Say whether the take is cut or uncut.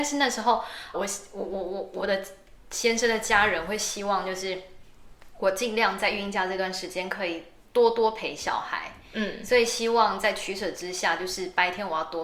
cut